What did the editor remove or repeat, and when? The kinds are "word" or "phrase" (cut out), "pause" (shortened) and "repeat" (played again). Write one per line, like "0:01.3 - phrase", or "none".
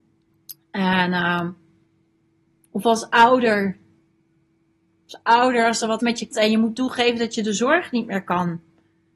0:06.0 - word
0:06.3 - word